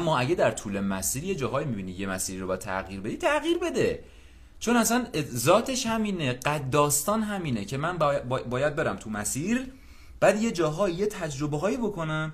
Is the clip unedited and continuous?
yes; 0 cuts

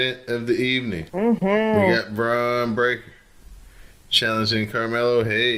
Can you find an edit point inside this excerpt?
yes; 1 cut; at 1.1 s

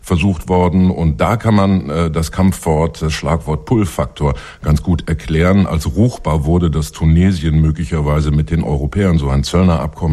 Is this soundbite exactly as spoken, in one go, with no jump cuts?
yes; 0 cuts

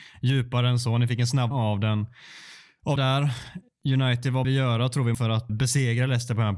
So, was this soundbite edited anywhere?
yes; 5 cuts; at 1.5 s, 3.0 s, 4.4 s, 5.1 s, 5.5 s

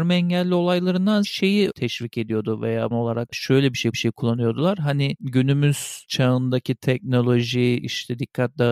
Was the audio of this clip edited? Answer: yes; 4 cuts; at 1.2 s, 1.7 s, 2.9 s, 3.9 s

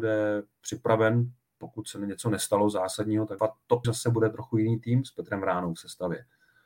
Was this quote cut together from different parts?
yes; 2 cuts; at 3.4 s, 3.8 s

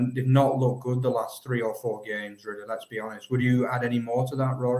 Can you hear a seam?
no; 0 cuts

